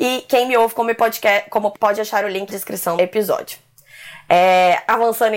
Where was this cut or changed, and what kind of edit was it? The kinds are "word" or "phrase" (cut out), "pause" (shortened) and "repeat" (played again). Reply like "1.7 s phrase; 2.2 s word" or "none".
1.7 s word; 2.5 s word; 3.0 s word